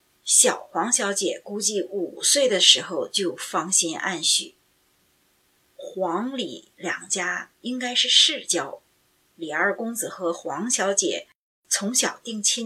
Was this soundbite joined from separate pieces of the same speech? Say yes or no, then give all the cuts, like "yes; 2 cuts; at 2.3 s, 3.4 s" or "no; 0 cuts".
no; 0 cuts